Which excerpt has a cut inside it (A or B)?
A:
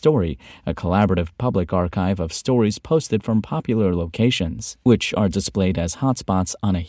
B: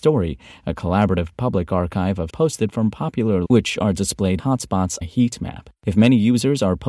B